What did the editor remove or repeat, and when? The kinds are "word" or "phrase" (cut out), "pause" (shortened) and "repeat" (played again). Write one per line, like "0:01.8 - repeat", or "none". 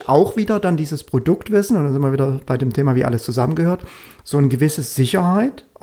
none